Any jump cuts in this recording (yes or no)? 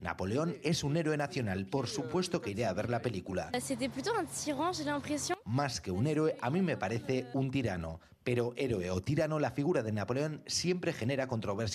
no